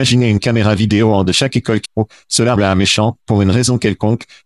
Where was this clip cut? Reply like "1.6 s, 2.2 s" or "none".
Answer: 1.2 s, 1.8 s, 2.6 s